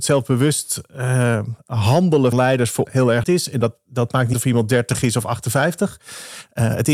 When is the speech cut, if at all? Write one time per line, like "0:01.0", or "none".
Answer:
0:02.3
0:02.8
0:03.2
0:04.3